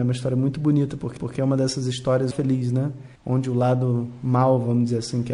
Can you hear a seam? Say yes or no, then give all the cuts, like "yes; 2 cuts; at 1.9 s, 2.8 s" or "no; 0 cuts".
yes; 3 cuts; at 1.2 s, 2.3 s, 3.2 s